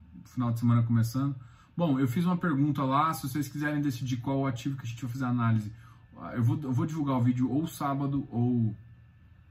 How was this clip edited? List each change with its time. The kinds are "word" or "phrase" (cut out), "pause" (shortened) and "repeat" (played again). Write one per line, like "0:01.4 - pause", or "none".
none